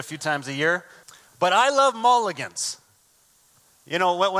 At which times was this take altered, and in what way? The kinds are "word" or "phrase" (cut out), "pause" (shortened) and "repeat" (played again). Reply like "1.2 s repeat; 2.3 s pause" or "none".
1.0 s pause